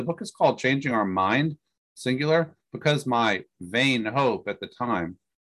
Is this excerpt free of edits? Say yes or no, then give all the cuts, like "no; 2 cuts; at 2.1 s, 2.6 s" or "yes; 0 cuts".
yes; 0 cuts